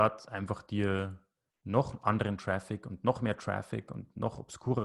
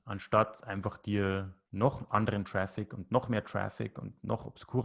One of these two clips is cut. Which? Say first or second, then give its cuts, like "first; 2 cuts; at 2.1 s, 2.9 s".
second; 1 cut; at 1.6 s